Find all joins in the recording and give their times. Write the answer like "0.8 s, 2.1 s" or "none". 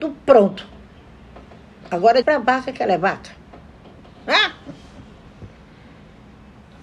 2.2 s